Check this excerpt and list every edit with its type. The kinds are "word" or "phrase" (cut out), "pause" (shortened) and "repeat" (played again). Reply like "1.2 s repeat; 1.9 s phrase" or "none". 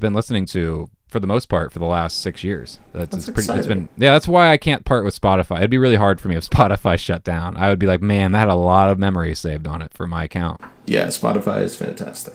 2.9 s pause